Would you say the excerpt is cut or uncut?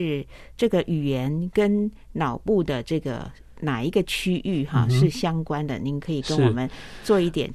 uncut